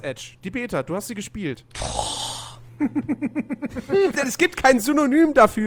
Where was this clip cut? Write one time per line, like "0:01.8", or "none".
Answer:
0:01.7
0:04.1